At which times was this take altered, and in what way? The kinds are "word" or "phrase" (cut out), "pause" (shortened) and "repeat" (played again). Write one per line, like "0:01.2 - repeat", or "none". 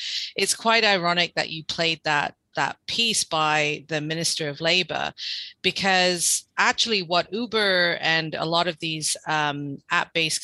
none